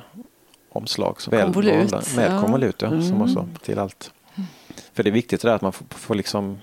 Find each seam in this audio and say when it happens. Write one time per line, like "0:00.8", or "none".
0:01.3
0:03.6
0:04.9